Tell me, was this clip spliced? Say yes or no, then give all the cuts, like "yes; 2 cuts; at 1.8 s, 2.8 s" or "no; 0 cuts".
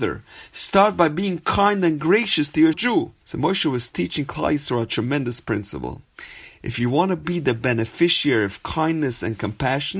yes; 2 cuts; at 2.7 s, 3.2 s